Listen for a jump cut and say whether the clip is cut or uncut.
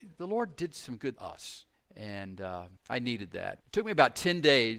cut